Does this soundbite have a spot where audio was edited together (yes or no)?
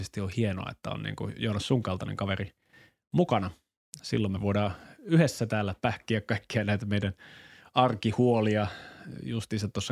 yes